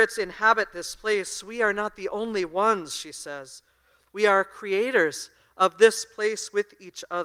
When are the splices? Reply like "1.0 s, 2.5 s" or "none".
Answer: none